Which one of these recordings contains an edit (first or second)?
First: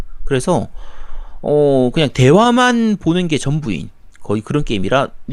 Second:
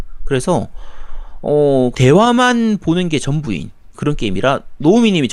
second